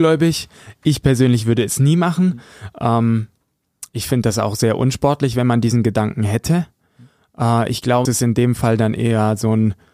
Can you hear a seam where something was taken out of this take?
yes; 2 cuts; at 3.9 s, 8.1 s

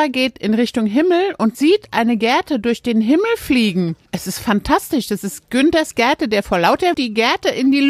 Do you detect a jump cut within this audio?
yes; 3 cuts; at 1.5 s, 4.1 s, 6.9 s

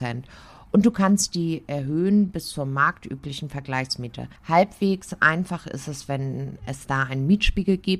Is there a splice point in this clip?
yes; 1 cut; at 4.4 s

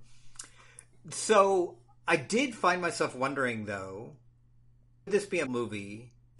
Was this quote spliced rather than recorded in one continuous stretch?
yes; 2 cuts; at 5.1 s, 5.5 s

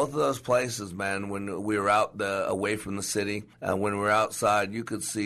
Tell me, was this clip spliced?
yes; 1 cut; at 3.5 s

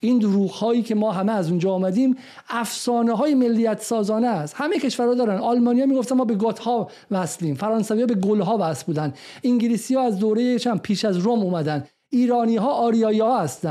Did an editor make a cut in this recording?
no; 0 cuts

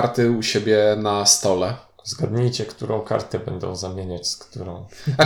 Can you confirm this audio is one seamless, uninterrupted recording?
yes; 0 cuts

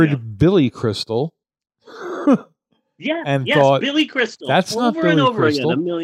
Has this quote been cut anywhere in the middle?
yes; 1 cut; at 1.4 s

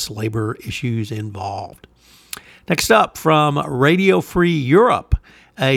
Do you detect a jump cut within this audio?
no; 0 cuts

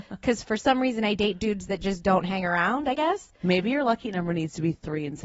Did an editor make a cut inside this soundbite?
no; 0 cuts

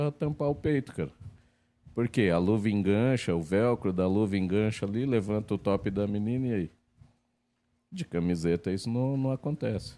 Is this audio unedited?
yes; 0 cuts

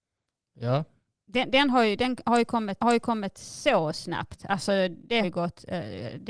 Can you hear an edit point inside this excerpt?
yes; 2 cuts; at 2.8 s, 5.2 s

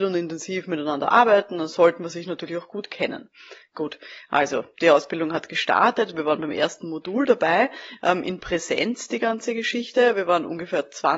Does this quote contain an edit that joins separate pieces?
no; 0 cuts

